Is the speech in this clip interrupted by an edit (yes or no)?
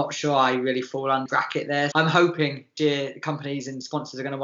yes